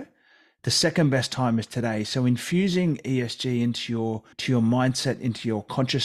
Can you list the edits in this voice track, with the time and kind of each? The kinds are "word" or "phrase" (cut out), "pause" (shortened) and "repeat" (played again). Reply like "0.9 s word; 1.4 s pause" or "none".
4.3 s pause